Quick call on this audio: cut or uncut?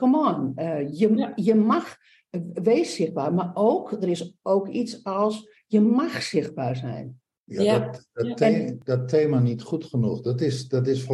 uncut